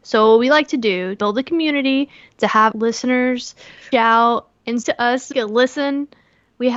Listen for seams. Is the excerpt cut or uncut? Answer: cut